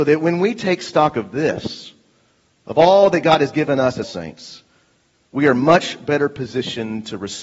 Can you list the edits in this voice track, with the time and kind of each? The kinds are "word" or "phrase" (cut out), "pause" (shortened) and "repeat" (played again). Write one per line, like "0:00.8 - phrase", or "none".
0:04.0 - word

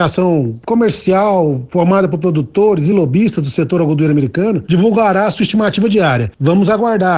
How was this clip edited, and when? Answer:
none

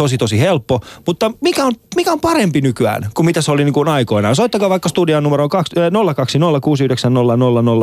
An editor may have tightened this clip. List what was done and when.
none

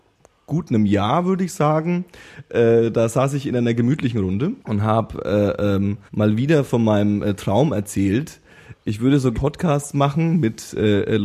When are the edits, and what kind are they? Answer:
0:04.6 - pause
0:06.1 - pause
0:09.3 - word

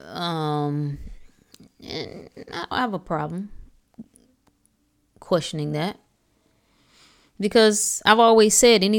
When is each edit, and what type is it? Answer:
0:02.7 - word

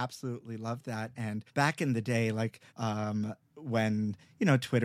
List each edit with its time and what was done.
0:01.5 - pause
0:02.7 - pause

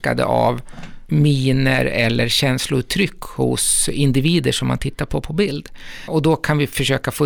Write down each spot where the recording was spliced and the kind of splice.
none

